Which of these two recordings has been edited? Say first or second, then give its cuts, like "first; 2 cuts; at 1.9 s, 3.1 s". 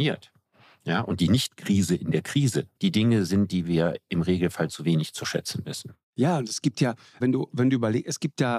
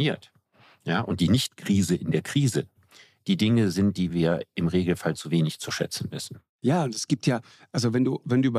first; 2 cuts; at 2.7 s, 7.2 s